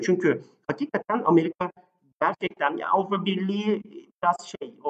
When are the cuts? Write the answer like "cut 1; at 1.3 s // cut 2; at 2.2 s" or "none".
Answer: none